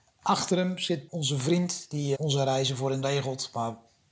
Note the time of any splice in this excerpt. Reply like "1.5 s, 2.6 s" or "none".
1.1 s, 2.1 s, 3.0 s